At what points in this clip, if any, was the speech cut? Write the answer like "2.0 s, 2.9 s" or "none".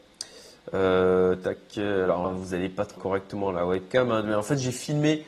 2.2 s, 3.0 s